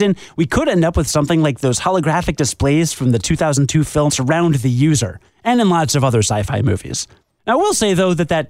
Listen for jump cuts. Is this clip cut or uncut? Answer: cut